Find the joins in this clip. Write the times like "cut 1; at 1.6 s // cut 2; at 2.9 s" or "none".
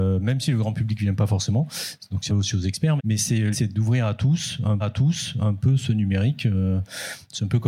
cut 1; at 2.3 s // cut 2; at 3.0 s // cut 3; at 3.5 s // cut 4; at 4.8 s